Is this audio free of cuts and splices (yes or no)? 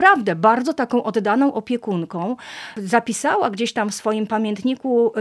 yes